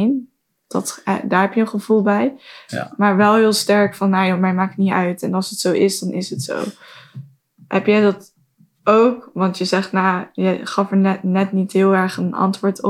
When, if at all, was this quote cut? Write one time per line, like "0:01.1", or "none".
none